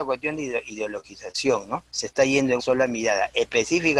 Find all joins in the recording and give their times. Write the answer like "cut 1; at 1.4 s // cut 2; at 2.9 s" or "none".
cut 1; at 1.9 s // cut 2; at 2.6 s